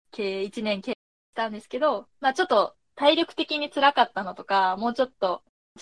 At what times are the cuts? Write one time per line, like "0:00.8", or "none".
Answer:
0:02.1